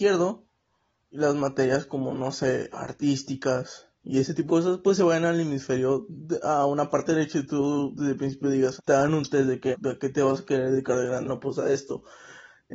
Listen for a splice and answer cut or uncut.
cut